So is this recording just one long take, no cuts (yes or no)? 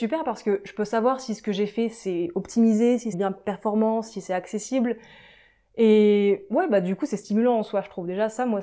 no